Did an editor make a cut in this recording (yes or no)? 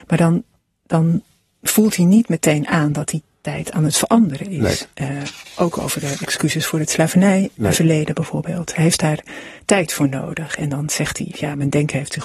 no